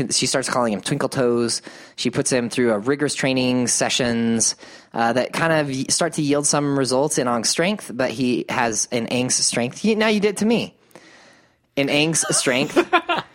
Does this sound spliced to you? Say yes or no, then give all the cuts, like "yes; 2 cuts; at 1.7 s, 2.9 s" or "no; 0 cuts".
no; 0 cuts